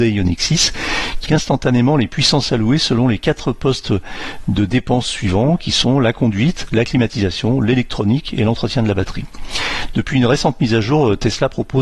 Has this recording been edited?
yes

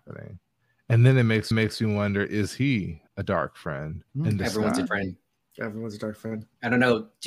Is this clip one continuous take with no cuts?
no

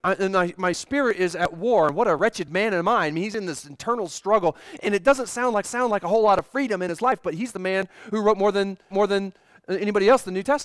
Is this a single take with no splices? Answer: no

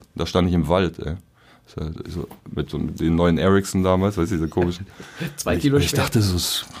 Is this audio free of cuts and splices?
yes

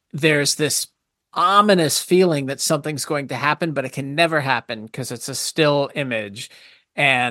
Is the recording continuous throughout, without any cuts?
yes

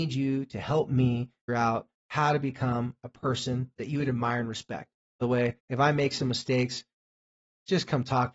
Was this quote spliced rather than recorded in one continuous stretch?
yes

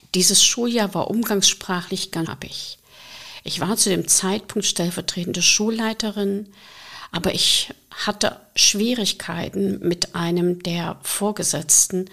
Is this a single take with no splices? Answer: no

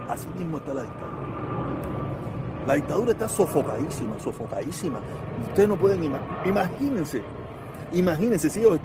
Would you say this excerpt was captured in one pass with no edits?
yes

